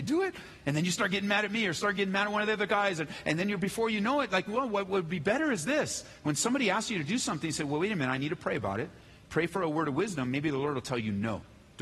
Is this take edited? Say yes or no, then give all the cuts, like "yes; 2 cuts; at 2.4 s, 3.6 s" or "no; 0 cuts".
no; 0 cuts